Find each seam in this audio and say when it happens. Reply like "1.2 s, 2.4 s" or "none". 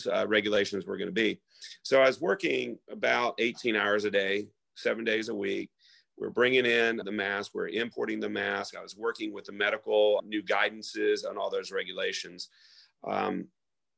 2.8 s, 7.0 s, 10.2 s

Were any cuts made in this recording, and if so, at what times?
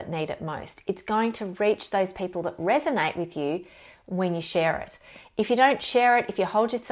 none

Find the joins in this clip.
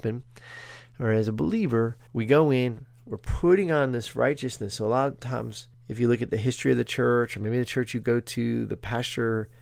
2.1 s, 5.7 s

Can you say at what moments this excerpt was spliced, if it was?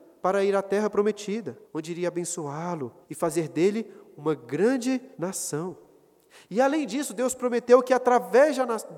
1.6 s, 3.0 s, 5.1 s

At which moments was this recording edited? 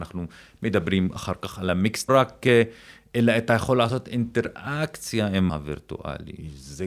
2.1 s, 5.5 s

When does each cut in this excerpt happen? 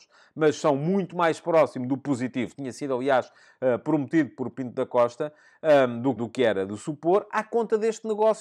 2.5 s, 6.2 s

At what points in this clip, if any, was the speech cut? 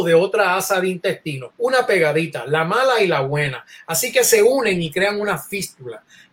1.5 s

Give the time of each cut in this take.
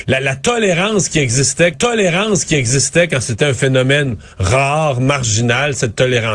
1.7 s

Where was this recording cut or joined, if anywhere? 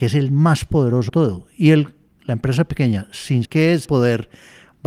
1.1 s, 3.4 s, 3.8 s

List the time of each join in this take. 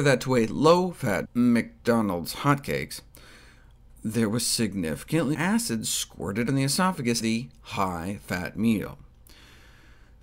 1.2 s, 5.3 s, 6.5 s, 7.2 s

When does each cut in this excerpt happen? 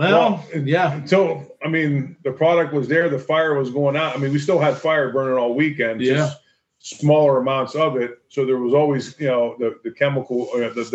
none

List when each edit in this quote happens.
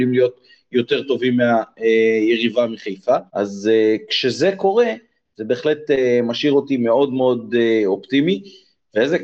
3.3 s

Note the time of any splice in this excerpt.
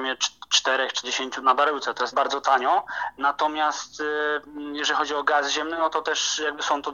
1.0 s, 1.4 s, 2.1 s

